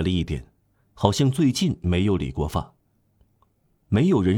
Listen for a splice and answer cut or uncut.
uncut